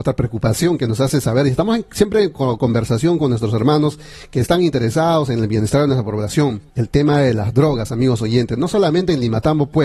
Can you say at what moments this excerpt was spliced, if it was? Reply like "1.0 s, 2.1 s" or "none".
6.7 s